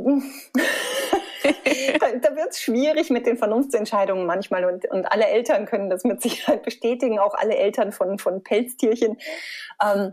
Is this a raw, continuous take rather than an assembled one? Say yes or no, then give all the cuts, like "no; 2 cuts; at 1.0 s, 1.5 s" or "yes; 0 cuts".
yes; 0 cuts